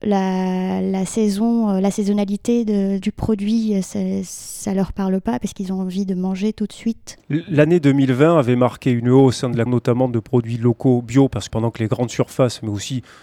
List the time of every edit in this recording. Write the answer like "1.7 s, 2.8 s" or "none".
3.0 s, 9.7 s, 11.5 s